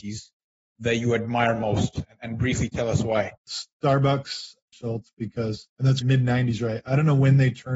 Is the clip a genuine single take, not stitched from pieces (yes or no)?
no